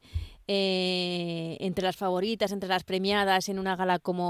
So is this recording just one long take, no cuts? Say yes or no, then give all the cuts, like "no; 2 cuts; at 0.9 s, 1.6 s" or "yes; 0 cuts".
yes; 0 cuts